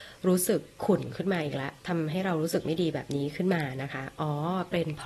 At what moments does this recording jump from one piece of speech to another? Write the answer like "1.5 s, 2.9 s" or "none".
none